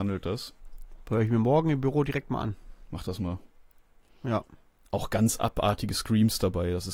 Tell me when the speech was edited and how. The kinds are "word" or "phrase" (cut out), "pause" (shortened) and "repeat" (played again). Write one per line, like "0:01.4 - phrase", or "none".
none